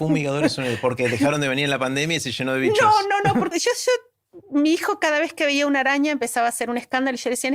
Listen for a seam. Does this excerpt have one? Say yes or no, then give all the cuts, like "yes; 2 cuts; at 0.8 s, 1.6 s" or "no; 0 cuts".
yes; 1 cut; at 3.5 s